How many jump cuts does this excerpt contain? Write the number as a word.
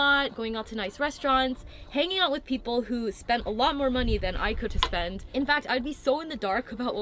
one